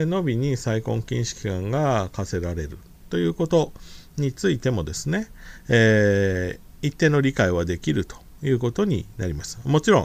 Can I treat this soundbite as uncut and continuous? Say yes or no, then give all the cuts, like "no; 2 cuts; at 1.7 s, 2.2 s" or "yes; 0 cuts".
yes; 0 cuts